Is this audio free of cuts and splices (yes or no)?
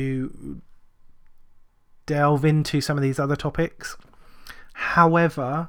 yes